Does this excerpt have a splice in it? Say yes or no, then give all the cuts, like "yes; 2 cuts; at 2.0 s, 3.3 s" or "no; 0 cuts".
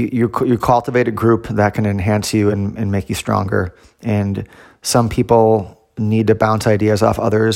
no; 0 cuts